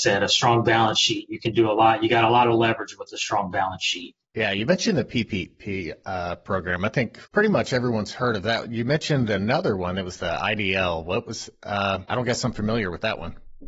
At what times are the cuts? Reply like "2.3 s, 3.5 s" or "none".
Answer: 7.3 s, 12.1 s

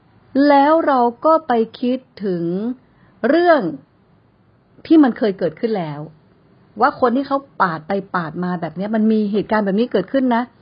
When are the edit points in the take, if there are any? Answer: none

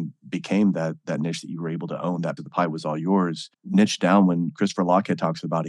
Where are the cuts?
2.4 s, 3.5 s

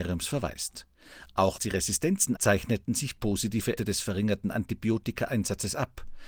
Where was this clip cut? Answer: 1.6 s, 2.4 s, 3.8 s

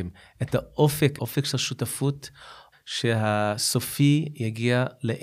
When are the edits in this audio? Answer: 1.2 s, 2.7 s

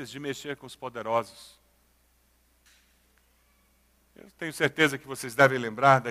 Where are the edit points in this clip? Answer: none

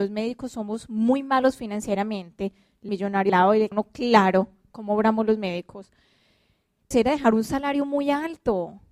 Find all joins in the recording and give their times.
2.9 s, 3.3 s, 3.7 s, 6.9 s

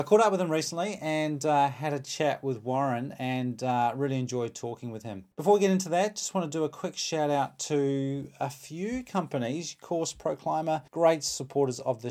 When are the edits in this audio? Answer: 5.3 s, 10.9 s

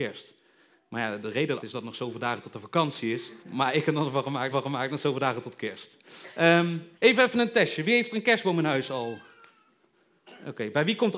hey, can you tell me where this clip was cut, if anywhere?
1.6 s, 3.4 s, 4.5 s, 7.0 s

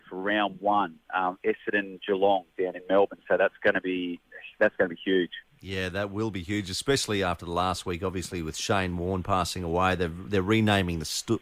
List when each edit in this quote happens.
none

